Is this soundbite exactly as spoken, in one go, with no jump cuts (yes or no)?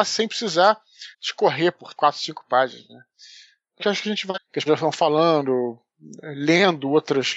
no